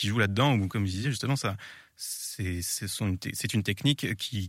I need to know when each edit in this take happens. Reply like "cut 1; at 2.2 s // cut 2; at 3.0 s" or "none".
none